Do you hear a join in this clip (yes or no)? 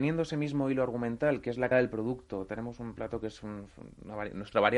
yes